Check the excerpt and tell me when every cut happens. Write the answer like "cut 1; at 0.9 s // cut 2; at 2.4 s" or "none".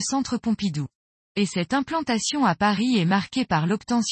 cut 1; at 1.1 s